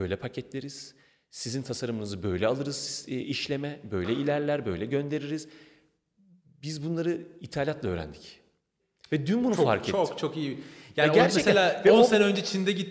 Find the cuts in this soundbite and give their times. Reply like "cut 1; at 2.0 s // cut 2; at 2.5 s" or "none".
none

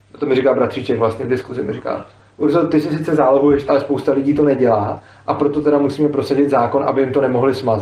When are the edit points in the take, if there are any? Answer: cut 1; at 3.7 s

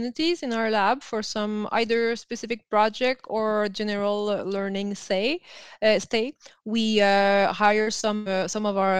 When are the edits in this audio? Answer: none

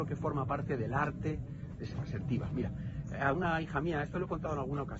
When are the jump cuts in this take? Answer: cut 1; at 1.9 s

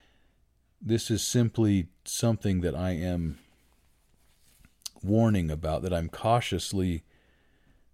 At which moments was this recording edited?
none

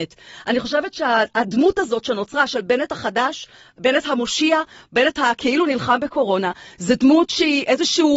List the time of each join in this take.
none

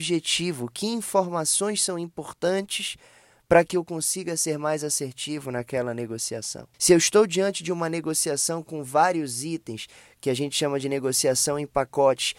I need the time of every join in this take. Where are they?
cut 1; at 6.7 s

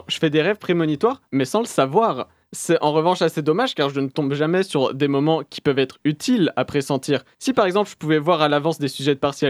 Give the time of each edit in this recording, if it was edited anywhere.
cut 1; at 1.3 s // cut 2; at 2.4 s // cut 3; at 7.3 s

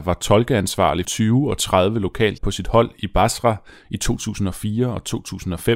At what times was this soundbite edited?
cut 1; at 1.0 s // cut 2; at 2.4 s

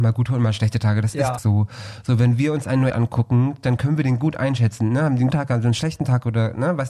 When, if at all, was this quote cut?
cut 1; at 1.4 s // cut 2; at 2.9 s // cut 3; at 5.3 s

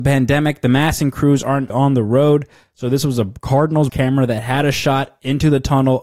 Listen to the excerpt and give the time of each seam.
cut 1; at 1.7 s // cut 2; at 3.9 s

